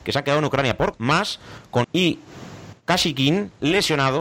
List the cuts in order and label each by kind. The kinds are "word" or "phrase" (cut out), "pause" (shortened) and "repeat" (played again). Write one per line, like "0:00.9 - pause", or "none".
0:00.9 - word
0:01.8 - word